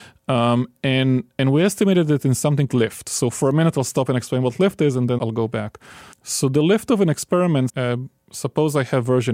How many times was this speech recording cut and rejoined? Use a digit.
4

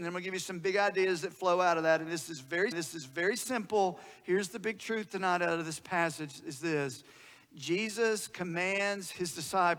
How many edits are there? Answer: 1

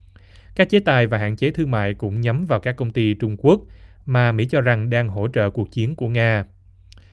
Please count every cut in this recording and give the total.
0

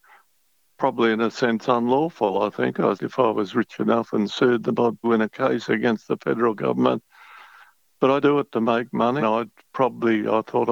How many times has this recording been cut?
4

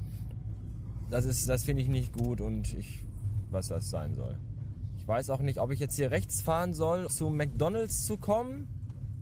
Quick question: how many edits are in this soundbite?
3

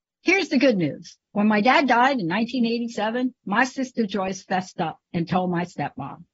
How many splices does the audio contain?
1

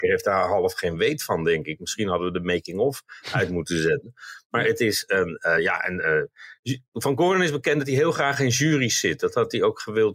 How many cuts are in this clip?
0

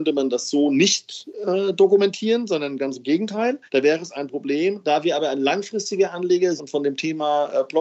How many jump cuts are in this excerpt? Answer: 2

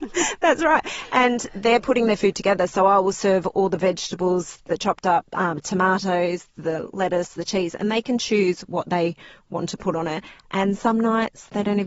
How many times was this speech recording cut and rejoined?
0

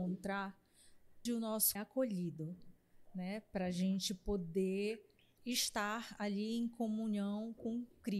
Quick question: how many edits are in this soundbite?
3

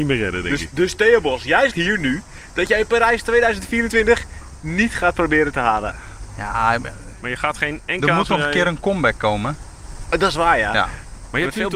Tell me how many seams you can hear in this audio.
1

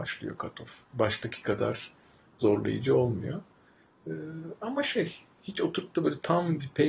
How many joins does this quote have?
0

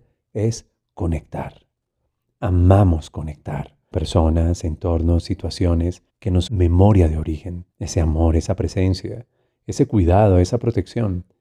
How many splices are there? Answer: 4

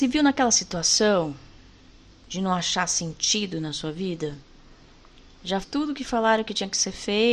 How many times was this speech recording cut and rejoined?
1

